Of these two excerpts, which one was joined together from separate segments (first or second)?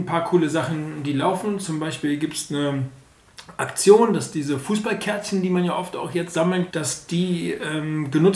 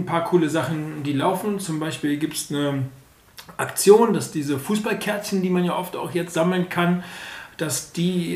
first